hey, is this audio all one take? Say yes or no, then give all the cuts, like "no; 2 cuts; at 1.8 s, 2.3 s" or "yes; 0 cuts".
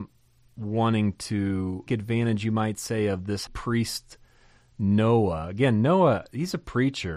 no; 2 cuts; at 1.9 s, 3.5 s